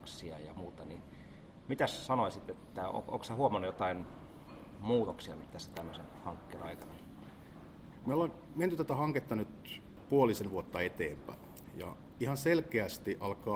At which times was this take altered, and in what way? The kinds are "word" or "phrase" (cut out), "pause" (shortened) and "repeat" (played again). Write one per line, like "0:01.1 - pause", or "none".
none